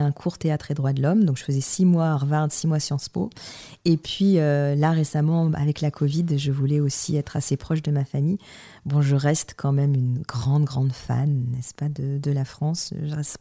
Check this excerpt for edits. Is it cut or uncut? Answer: uncut